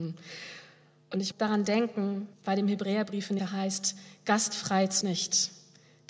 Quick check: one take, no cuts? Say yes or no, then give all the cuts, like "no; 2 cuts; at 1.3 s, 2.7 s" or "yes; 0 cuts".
no; 4 cuts; at 1.3 s, 2.3 s, 3.4 s, 5.0 s